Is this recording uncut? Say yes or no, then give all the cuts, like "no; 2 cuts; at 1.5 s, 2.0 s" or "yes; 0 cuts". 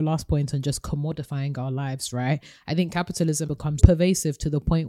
no; 2 cuts; at 3.4 s, 3.8 s